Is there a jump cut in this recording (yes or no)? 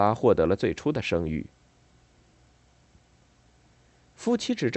no